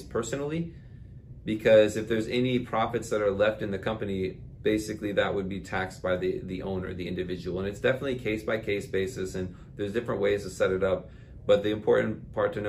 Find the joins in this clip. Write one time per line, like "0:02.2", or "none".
none